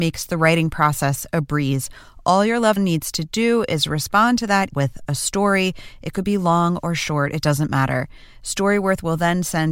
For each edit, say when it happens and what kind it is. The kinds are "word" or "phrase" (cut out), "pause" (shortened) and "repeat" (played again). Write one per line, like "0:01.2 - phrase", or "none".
0:02.8 - word
0:04.7 - word